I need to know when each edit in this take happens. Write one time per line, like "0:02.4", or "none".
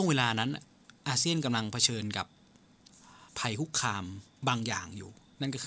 0:01.0
0:03.3
0:04.3

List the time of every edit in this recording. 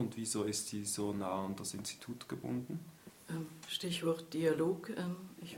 none

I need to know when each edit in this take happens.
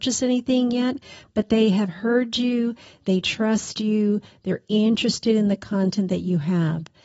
none

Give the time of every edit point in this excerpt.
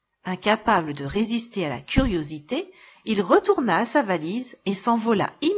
none

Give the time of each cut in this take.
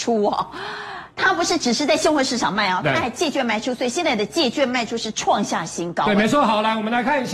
0:01.1

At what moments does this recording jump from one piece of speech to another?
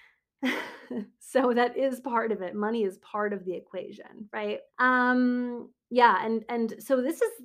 0:04.7

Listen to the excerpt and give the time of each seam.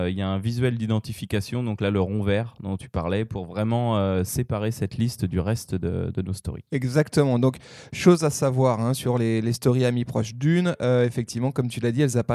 0:06.7

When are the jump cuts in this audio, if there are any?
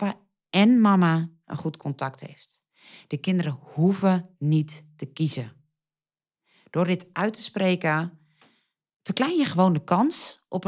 none

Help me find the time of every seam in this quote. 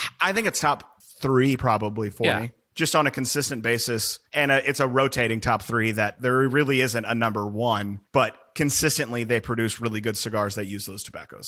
0:01.0
0:04.3
0:08.1

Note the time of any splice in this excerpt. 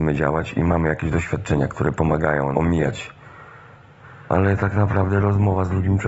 0:02.5
0:04.3

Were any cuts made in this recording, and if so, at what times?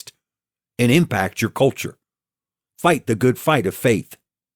none

